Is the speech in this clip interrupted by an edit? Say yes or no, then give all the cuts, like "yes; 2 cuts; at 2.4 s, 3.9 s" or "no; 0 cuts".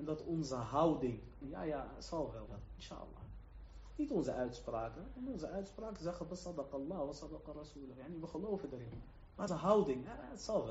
yes; 3 cuts; at 1.4 s, 2.5 s, 9.5 s